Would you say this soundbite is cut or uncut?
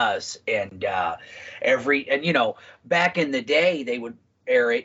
uncut